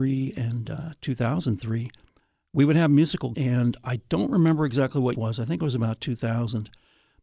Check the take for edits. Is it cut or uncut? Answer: cut